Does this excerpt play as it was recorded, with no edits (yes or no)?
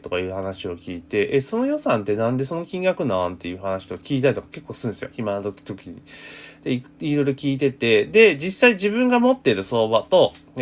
yes